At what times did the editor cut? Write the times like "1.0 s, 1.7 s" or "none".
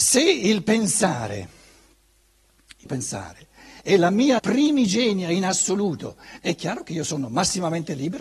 2.9 s, 4.4 s, 6.4 s